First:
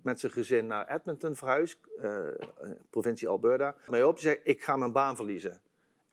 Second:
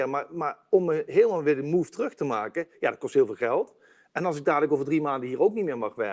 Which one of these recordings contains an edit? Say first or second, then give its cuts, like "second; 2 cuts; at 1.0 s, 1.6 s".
first; 1 cut; at 3.9 s